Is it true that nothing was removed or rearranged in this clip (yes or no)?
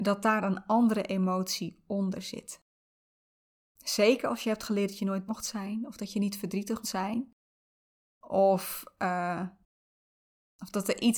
no